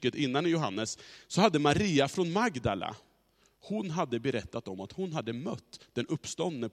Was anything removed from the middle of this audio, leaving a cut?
no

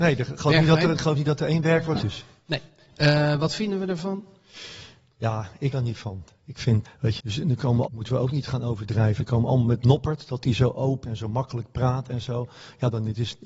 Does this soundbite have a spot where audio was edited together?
yes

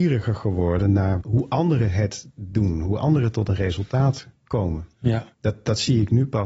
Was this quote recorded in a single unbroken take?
no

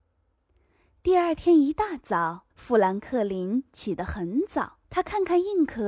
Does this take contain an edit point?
yes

